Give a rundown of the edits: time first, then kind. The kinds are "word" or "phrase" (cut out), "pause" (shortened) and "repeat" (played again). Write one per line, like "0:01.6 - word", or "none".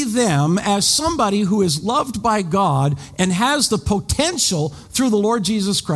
none